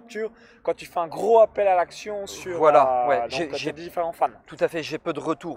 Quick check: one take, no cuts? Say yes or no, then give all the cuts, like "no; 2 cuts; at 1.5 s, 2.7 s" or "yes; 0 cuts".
yes; 0 cuts